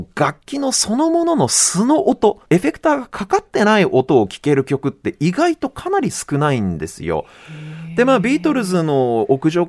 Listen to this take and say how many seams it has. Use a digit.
1